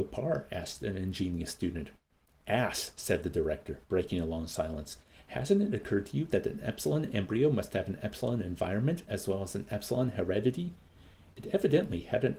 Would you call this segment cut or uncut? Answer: uncut